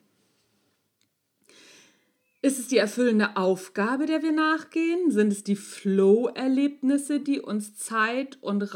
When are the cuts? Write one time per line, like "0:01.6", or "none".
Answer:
none